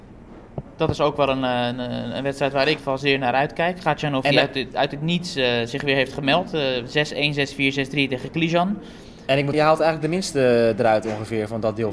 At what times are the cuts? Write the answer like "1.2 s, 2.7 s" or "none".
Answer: 2.8 s, 9.5 s